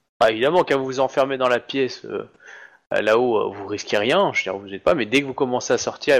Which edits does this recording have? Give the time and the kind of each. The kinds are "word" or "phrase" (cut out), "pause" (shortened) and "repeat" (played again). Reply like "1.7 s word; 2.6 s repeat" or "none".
none